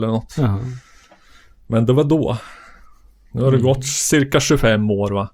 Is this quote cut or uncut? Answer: uncut